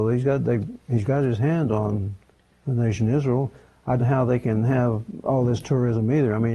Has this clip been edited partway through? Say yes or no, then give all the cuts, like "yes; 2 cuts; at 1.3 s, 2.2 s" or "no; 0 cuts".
yes; 2 cuts; at 2.3 s, 4.0 s